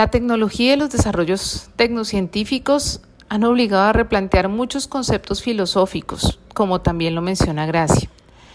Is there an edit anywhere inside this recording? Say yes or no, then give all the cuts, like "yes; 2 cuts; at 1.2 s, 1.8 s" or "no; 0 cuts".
no; 0 cuts